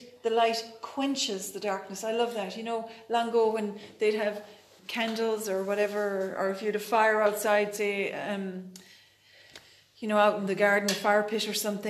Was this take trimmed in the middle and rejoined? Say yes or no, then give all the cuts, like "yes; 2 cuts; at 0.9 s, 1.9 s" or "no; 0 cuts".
yes; 1 cut; at 4.8 s